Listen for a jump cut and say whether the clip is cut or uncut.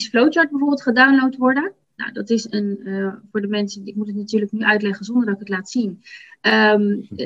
uncut